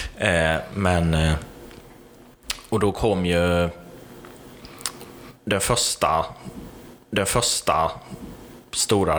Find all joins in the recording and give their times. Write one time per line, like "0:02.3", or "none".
0:07.0